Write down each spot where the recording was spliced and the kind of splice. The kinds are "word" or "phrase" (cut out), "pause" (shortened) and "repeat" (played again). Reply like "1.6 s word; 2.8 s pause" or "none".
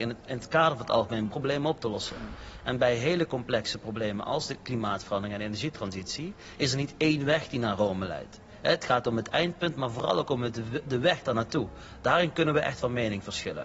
1.3 s word